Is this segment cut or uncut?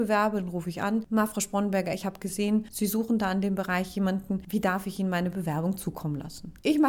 uncut